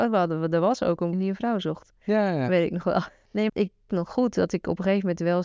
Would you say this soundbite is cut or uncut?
cut